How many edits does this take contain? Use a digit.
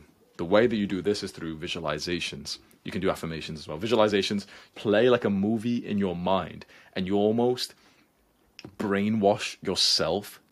1